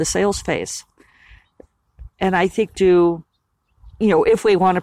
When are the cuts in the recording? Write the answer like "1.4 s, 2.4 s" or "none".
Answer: 2.1 s, 2.7 s